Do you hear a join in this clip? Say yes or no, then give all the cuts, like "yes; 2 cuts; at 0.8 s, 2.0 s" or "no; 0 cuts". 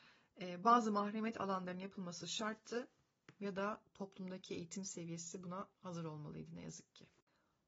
yes; 1 cut; at 5.7 s